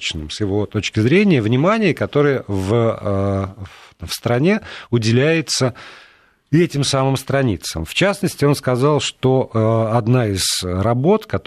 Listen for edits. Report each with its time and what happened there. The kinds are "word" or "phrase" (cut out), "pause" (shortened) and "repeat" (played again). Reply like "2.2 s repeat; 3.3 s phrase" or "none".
none

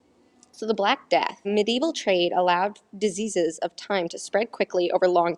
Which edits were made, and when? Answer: 1.4 s word

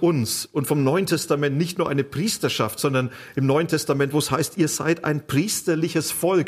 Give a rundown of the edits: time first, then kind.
none

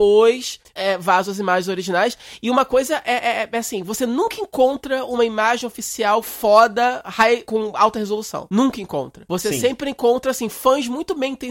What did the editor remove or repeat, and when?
7.5 s word

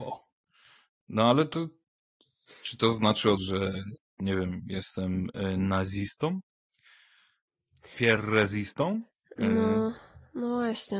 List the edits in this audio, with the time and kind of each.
3.4 s word

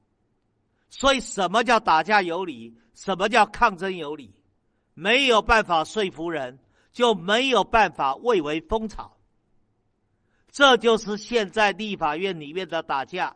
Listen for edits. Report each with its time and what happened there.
none

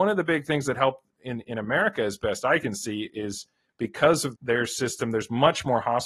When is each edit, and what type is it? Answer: 1.1 s word; 4.4 s word

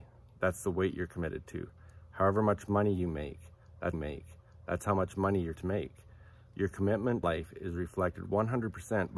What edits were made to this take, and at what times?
3.9 s repeat; 5.6 s word; 7.2 s word

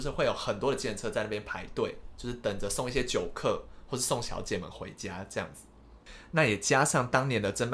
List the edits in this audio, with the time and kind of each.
none

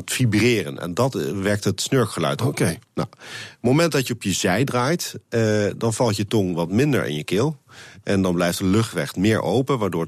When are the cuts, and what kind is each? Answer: 2.8 s pause

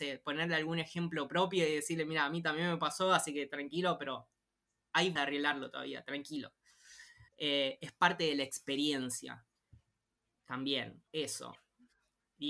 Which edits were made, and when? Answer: 5.2 s word; 7.3 s pause; 11.1 s pause

